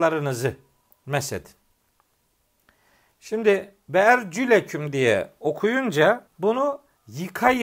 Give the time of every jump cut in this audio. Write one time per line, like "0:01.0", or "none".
0:06.3